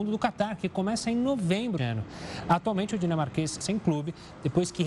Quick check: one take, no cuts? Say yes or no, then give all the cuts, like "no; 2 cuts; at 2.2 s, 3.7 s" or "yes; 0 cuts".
no; 2 cuts; at 1.8 s, 3.6 s